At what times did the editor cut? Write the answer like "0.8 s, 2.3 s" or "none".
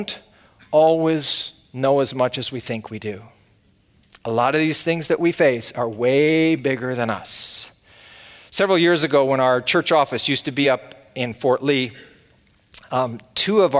none